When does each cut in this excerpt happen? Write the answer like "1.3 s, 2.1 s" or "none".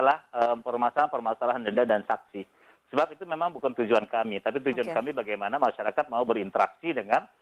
none